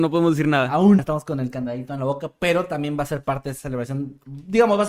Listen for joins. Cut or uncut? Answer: cut